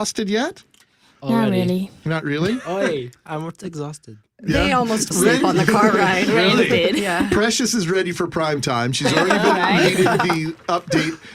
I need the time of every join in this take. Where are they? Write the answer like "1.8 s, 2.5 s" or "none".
5.1 s

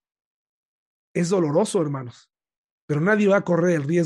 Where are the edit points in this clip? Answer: 2.7 s

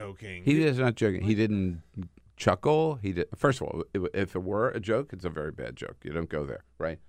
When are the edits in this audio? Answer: none

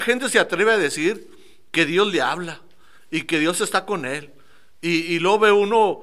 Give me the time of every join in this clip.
none

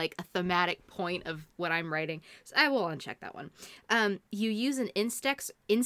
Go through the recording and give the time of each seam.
4.3 s

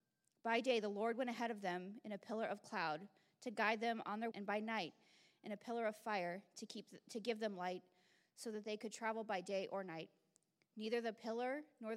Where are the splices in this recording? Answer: 4.3 s

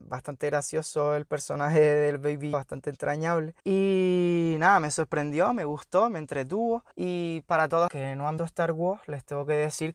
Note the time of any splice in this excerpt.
2.5 s, 3.6 s, 6.9 s, 7.9 s, 8.4 s

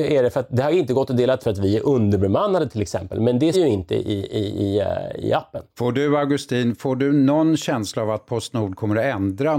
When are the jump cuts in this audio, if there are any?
1.4 s, 3.5 s, 5.7 s

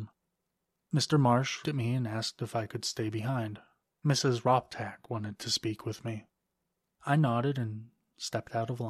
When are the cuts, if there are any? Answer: 1.6 s

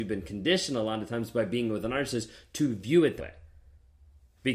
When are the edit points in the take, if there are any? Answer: 3.2 s

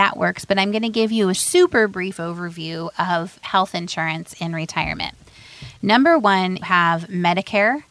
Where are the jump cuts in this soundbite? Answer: 1.3 s, 6.6 s

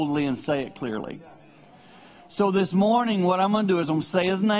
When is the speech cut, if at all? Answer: none

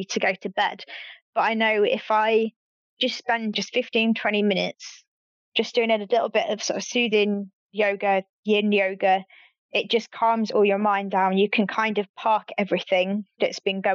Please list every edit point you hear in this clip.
3.5 s

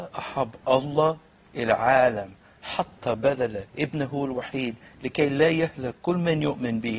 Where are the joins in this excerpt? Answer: 3.7 s

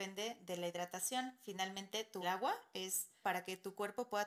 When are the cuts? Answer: 2.2 s, 3.2 s

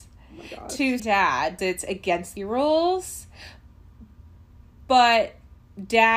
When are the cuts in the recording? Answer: 1.0 s, 1.6 s, 2.4 s

